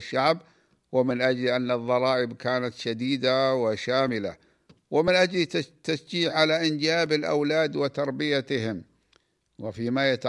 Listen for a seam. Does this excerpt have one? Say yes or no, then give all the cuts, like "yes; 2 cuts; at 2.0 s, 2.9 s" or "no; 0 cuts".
no; 0 cuts